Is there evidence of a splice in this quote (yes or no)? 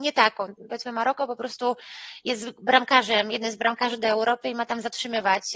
no